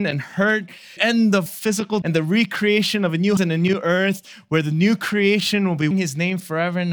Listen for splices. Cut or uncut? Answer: cut